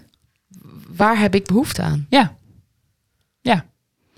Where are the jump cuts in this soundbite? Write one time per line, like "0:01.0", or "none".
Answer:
none